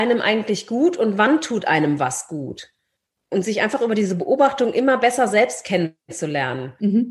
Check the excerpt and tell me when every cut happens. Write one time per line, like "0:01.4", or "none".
none